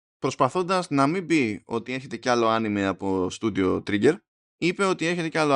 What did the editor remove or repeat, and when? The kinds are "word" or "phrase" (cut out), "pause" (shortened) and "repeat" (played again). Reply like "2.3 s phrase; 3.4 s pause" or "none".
4.4 s pause